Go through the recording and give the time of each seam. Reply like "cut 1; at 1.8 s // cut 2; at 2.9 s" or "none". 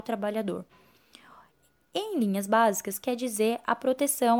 none